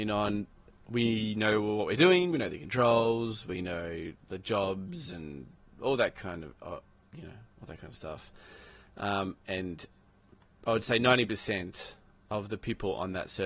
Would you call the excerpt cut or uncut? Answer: uncut